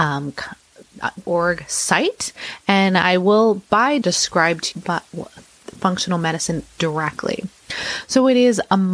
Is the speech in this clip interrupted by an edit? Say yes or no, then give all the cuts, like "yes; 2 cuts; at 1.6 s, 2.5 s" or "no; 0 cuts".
yes; 4 cuts; at 1.2 s, 4.0 s, 4.7 s, 6.8 s